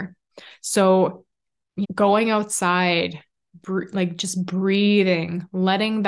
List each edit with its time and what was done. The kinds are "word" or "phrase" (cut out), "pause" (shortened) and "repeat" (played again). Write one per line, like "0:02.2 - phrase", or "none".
0:01.8 - word